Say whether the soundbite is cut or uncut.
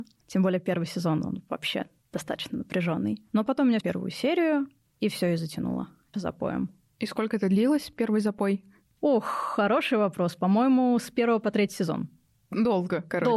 cut